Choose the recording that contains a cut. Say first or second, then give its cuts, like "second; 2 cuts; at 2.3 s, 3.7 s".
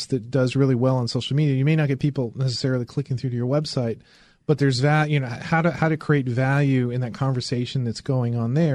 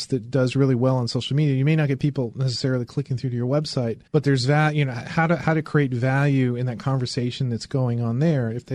second; 1 cut; at 4.1 s